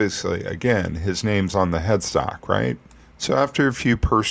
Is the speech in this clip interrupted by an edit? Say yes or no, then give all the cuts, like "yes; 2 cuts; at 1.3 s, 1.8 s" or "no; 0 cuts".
no; 0 cuts